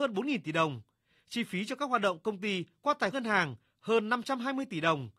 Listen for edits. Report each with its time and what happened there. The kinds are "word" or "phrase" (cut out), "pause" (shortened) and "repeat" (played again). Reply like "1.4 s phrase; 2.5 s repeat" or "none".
3.1 s word